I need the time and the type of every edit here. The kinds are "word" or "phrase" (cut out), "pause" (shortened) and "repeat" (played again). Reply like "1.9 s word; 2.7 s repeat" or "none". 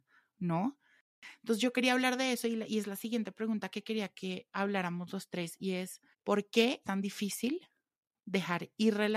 3.7 s word; 6.1 s pause; 6.8 s word

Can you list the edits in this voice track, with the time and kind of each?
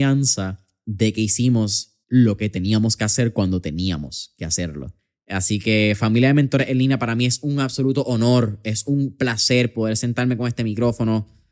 2.0 s pause

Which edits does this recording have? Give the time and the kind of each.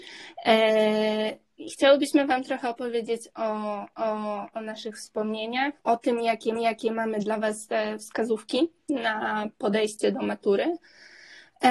3.9 s repeat; 5.8 s pause; 6.6 s repeat; 9.5 s pause

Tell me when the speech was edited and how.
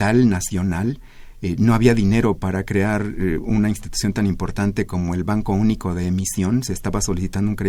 none

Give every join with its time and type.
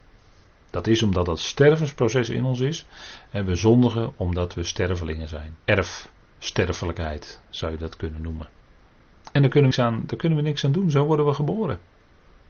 5.6 s pause; 9.7 s word

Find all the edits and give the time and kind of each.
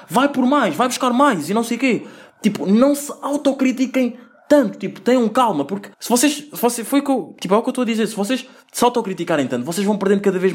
5.9 s pause

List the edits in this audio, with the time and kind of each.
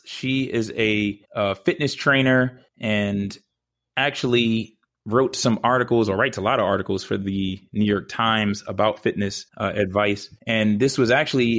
1.2 s pause; 2.7 s pause; 4.9 s pause; 9.5 s pause; 10.4 s pause

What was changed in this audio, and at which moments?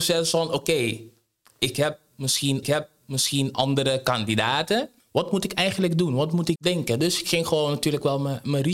2.6 s repeat; 5.0 s pause; 6.6 s word

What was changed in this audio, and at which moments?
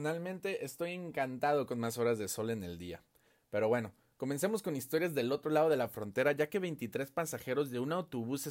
none

